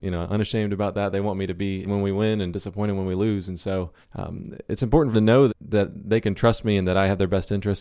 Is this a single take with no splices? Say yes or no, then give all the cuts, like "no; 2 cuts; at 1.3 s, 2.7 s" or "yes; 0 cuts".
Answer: no; 4 cuts; at 1.8 s, 4.0 s, 5.1 s, 5.5 s